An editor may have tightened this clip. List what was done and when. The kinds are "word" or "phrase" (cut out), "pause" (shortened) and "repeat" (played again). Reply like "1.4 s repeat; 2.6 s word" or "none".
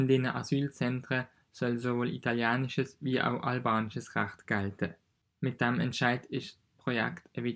5.2 s pause